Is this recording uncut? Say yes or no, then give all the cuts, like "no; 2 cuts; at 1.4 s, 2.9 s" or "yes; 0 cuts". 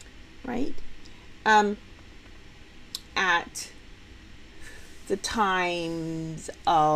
no; 1 cut; at 3.1 s